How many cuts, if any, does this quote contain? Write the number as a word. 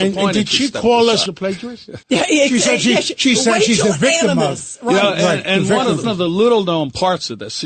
three